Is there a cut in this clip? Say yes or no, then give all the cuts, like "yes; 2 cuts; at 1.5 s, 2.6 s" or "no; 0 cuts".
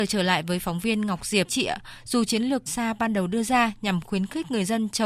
yes; 2 cuts; at 1.5 s, 2.7 s